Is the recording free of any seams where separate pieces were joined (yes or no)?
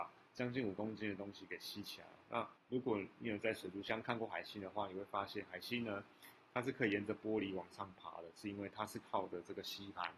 no